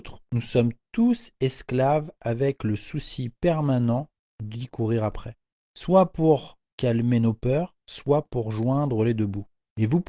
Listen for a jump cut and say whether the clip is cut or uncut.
uncut